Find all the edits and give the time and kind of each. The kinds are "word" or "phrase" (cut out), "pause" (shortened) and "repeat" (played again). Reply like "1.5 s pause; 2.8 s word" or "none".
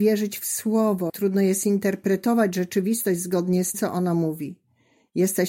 1.1 s word; 3.7 s word